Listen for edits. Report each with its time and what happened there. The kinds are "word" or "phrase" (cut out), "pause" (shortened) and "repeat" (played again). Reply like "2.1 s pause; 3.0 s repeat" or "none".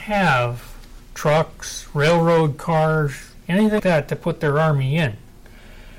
3.8 s word